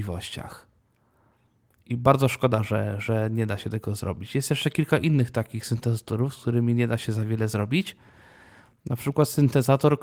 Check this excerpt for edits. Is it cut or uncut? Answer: uncut